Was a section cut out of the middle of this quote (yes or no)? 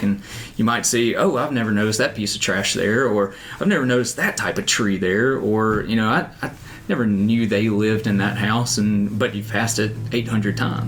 no